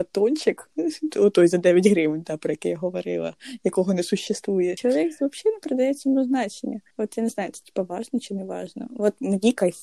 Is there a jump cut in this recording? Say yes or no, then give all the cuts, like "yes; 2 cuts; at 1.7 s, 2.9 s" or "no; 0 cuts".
yes; 1 cut; at 6.9 s